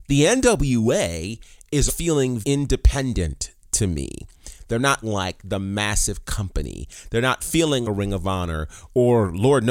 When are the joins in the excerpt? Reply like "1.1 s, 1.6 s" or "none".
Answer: 1.9 s, 2.4 s, 5.0 s, 7.8 s

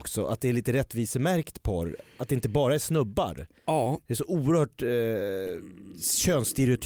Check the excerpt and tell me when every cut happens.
none

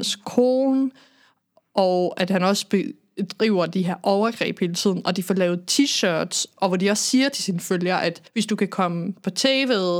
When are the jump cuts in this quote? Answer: 8.3 s

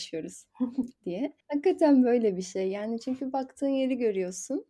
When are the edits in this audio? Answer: 1.4 s

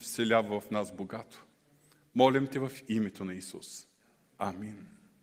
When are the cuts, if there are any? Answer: none

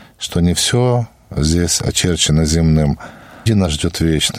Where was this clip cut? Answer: 3.5 s

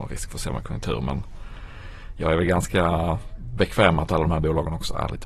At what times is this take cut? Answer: none

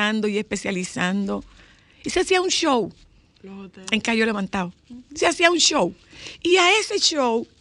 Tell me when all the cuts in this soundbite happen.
none

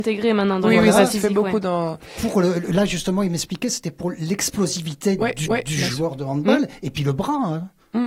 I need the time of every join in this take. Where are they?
5.5 s

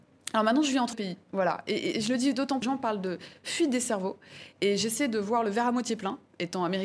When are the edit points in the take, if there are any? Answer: 0.9 s, 1.9 s, 2.6 s

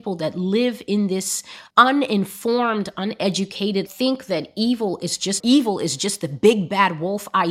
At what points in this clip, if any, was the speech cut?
1.7 s, 3.9 s, 5.4 s

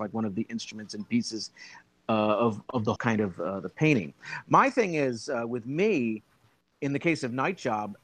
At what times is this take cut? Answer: 3.0 s

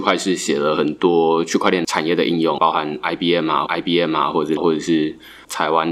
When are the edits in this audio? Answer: 3.7 s, 4.6 s

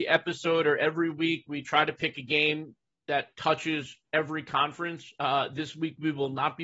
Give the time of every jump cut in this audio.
none

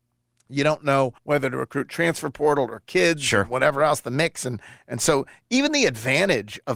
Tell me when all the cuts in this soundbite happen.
1.2 s

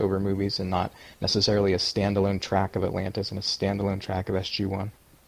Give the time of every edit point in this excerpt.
1.1 s

